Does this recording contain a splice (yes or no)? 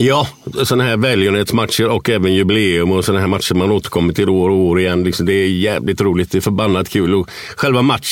no